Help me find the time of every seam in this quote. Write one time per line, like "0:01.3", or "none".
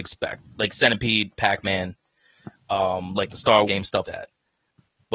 0:01.4
0:03.7
0:04.0